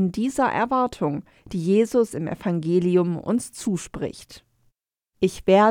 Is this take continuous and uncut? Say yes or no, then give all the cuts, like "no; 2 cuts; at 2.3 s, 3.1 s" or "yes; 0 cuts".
yes; 0 cuts